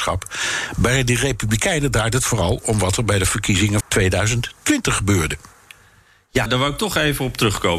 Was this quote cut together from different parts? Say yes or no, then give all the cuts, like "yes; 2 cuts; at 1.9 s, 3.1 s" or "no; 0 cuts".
yes; 2 cuts; at 3.8 s, 6.5 s